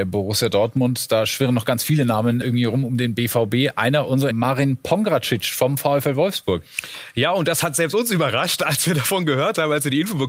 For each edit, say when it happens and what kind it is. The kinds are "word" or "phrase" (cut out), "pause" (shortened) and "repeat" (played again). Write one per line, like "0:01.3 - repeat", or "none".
0:02.4 - word
0:04.3 - phrase